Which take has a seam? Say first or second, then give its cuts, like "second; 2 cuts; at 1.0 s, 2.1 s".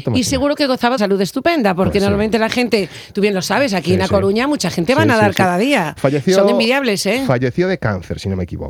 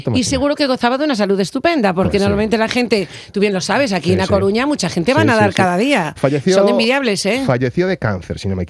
first; 1 cut; at 1.0 s